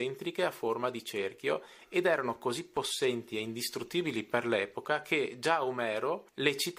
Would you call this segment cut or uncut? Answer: uncut